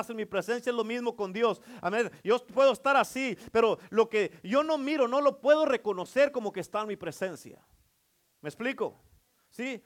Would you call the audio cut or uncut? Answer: uncut